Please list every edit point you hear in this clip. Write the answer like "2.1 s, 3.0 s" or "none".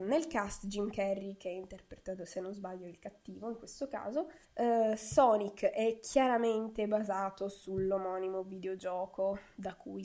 4.4 s